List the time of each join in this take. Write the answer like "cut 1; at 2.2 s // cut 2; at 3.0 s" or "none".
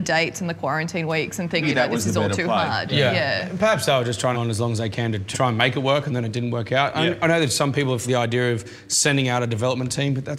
cut 1; at 1.6 s // cut 2; at 4.3 s // cut 3; at 5.3 s // cut 4; at 8.0 s